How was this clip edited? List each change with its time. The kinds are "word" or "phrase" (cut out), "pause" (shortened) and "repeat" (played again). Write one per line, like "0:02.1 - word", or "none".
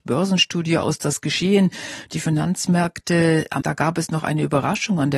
0:03.6 - word